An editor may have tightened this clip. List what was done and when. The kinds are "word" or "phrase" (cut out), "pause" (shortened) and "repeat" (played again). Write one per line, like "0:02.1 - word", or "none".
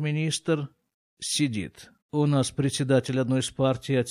0:02.0 - pause